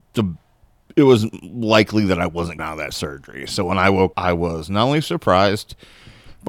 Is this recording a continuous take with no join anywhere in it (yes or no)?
no